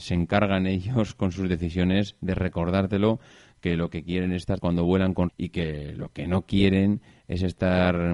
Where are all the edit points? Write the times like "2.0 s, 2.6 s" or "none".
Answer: 4.6 s, 5.3 s